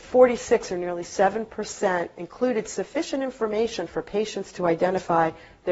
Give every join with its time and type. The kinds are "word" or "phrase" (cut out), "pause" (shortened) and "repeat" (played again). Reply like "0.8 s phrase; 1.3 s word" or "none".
none